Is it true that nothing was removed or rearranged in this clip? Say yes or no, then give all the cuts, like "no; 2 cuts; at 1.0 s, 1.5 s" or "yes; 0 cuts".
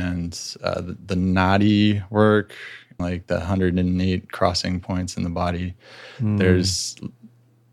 no; 1 cut; at 3.0 s